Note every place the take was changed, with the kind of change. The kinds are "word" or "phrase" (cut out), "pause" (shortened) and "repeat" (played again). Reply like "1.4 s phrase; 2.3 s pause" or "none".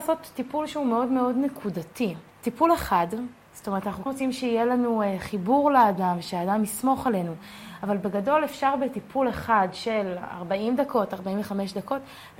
2.3 s pause; 4.1 s word